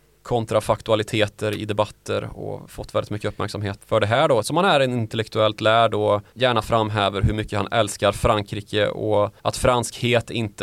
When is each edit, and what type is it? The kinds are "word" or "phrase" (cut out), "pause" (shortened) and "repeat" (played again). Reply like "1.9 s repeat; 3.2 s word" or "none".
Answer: 3.8 s word; 4.4 s word; 6.3 s pause; 9.4 s pause